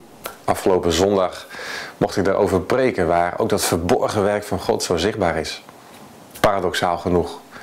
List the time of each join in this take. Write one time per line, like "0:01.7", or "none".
0:06.3